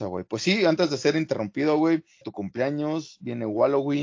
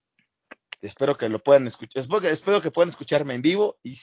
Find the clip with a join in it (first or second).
first